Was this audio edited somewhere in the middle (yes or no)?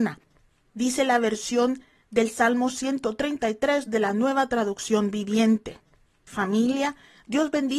no